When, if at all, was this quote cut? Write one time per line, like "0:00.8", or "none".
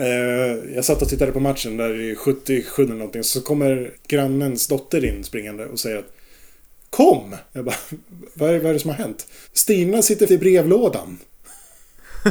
0:02.9
0:03.9
0:07.5
0:09.4
0:10.3